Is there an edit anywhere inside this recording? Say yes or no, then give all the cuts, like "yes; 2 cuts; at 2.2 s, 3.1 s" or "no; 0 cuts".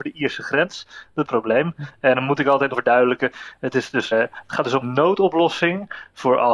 yes; 4 cuts; at 1.2 s, 2.7 s, 4.1 s, 4.8 s